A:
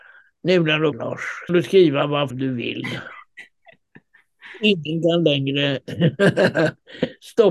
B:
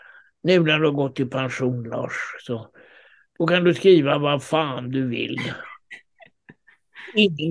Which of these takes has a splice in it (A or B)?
A